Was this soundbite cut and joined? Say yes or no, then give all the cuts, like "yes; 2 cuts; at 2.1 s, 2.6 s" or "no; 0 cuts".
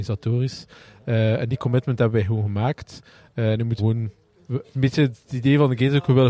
yes; 2 cuts; at 3.8 s, 4.6 s